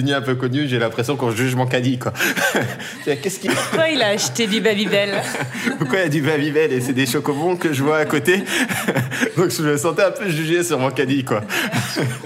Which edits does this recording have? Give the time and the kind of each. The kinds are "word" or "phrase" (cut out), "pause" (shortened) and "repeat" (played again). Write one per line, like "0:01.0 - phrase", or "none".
0:03.5 - phrase